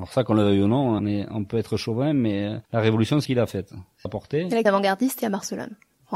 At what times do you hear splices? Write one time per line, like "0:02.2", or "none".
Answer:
0:01.0
0:02.6
0:03.3
0:04.1
0:04.7
0:05.2